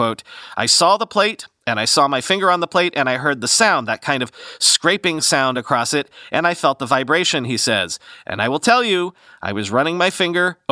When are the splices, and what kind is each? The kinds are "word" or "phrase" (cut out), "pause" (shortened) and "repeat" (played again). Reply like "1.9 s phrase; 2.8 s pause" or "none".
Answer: none

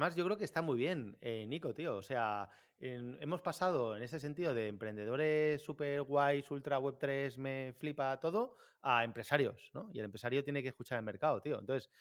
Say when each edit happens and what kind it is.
none

